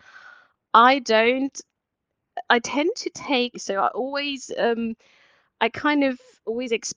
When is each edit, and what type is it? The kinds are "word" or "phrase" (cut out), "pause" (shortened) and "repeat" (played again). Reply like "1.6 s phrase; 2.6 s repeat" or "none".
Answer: 3.5 s phrase